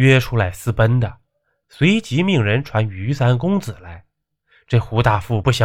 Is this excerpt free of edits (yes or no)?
yes